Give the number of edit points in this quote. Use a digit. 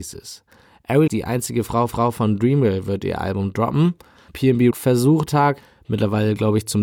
4